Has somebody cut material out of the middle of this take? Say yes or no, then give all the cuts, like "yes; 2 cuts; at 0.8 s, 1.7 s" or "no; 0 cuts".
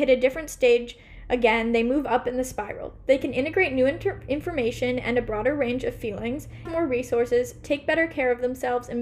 yes; 1 cut; at 6.7 s